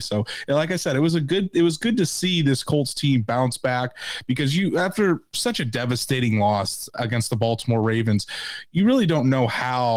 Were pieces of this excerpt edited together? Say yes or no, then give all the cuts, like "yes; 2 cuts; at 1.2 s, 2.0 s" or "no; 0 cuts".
no; 0 cuts